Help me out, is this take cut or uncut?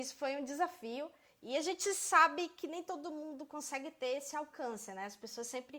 uncut